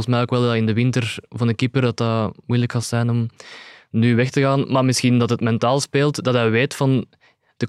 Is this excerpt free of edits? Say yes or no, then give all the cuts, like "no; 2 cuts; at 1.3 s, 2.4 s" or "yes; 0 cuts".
yes; 0 cuts